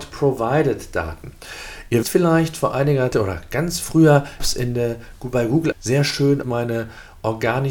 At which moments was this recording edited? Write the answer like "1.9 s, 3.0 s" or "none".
2.0 s, 3.1 s, 4.4 s, 5.7 s, 6.4 s